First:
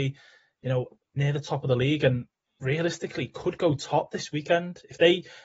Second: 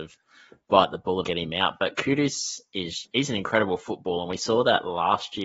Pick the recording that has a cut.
second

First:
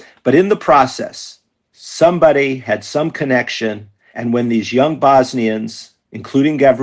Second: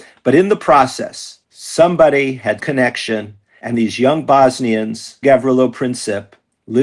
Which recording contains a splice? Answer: second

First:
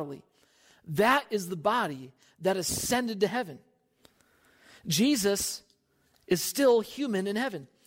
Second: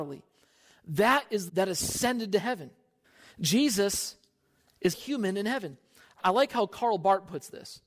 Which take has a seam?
second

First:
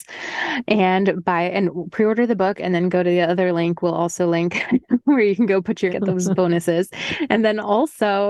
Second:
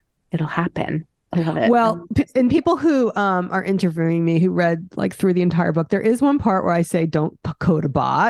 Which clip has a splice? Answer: first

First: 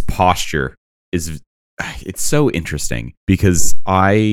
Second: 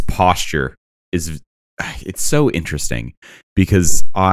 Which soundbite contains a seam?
first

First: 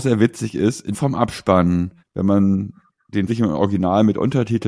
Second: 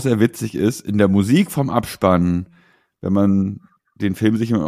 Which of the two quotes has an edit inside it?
first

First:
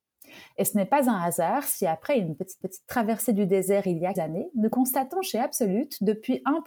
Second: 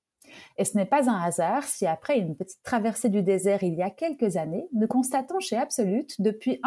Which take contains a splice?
first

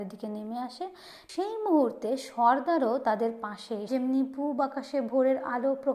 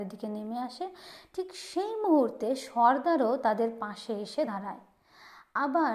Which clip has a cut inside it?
first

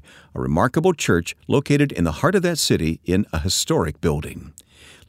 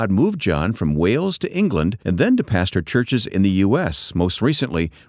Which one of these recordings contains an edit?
second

